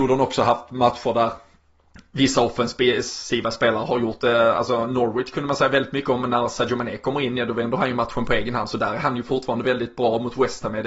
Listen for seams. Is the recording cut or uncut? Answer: uncut